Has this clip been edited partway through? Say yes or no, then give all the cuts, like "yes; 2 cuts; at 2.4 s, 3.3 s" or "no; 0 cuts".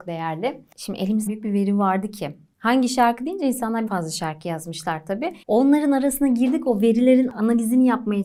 yes; 3 cuts; at 1.3 s, 3.9 s, 5.4 s